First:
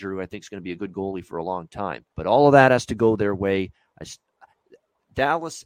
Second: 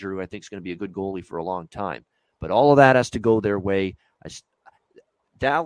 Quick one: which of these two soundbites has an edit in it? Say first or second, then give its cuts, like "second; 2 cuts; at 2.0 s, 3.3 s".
first; 1 cut; at 2.1 s